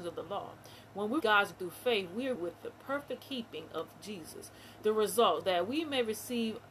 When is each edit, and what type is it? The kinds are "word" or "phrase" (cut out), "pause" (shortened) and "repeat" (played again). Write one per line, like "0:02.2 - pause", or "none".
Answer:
0:01.2 - word
0:01.5 - word
0:02.4 - word
0:03.2 - word
0:05.4 - word